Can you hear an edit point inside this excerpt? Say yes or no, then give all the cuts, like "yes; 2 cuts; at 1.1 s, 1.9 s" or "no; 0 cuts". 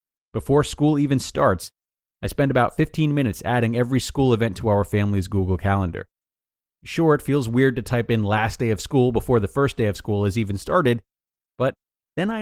no; 0 cuts